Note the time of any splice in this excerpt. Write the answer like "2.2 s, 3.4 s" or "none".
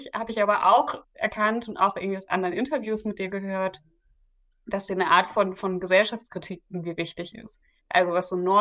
none